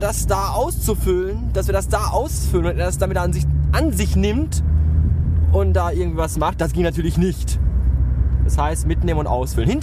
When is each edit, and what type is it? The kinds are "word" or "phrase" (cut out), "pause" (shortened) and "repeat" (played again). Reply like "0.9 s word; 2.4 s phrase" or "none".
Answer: none